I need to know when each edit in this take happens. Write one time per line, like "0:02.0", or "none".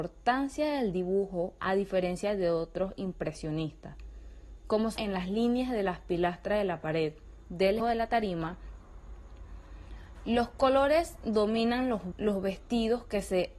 0:05.0
0:07.8
0:12.1